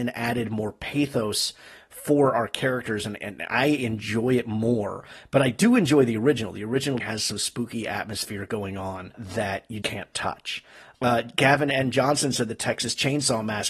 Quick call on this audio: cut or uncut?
cut